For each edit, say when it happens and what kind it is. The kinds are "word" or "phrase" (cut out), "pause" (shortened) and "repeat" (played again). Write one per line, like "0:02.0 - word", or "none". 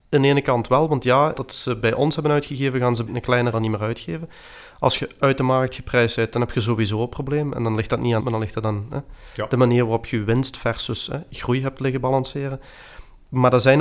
0:01.3 - word
0:03.1 - word
0:03.5 - word
0:08.2 - word